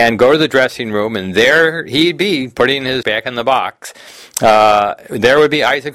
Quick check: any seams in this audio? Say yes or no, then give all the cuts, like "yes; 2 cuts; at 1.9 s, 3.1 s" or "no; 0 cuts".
yes; 1 cut; at 3.0 s